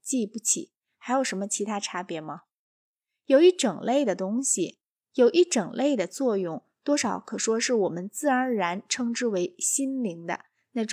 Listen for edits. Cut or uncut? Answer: uncut